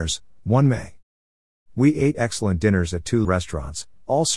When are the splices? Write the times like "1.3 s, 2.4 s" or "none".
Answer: 2.1 s, 3.2 s